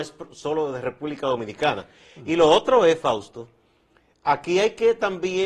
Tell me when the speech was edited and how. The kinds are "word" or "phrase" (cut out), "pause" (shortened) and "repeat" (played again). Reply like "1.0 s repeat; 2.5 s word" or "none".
none